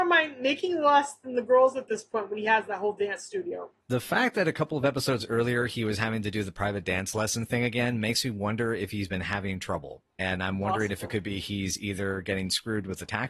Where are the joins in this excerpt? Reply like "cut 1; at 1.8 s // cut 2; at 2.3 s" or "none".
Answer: cut 1; at 3.8 s